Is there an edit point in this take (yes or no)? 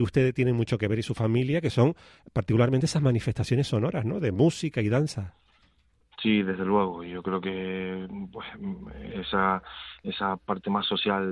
no